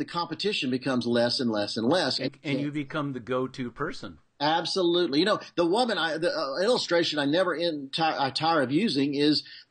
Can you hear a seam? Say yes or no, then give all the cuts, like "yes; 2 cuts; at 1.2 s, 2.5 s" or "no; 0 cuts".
yes; 1 cut; at 2.3 s